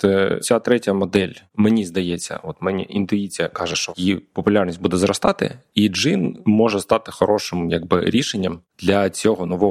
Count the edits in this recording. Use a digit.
0